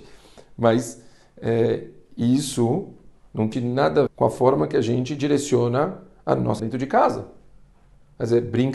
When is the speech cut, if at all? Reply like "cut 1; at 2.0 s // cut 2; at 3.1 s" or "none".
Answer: cut 1; at 3.5 s // cut 2; at 4.1 s // cut 3; at 6.6 s